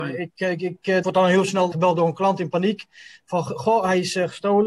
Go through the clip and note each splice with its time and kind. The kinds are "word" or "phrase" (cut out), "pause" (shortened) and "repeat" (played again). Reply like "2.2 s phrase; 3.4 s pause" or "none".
1.0 s word; 1.7 s word